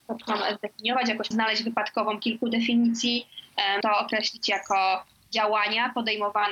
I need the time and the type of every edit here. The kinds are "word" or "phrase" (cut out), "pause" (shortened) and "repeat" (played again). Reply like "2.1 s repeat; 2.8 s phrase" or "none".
1.3 s word; 3.8 s word